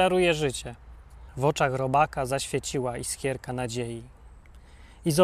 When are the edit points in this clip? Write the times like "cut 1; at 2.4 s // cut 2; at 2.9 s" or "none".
cut 1; at 1.3 s